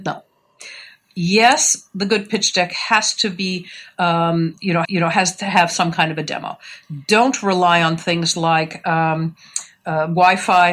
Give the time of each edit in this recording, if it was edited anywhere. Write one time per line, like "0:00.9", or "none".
0:04.8

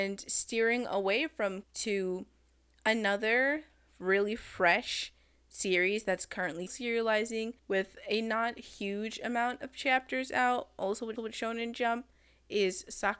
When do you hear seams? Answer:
0:01.6
0:06.7
0:07.6
0:11.2

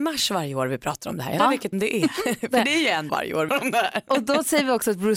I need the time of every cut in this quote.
0:01.4
0:01.7
0:03.1
0:03.5

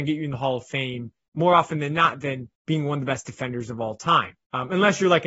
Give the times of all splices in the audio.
0:02.5
0:04.3

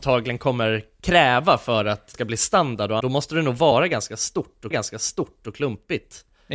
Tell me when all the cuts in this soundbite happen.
0:02.1
0:03.0
0:04.7

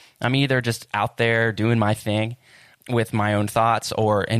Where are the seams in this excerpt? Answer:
0:02.7

